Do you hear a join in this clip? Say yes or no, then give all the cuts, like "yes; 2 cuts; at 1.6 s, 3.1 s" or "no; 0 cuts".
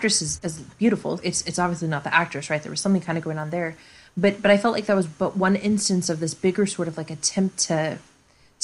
yes; 1 cut; at 1.2 s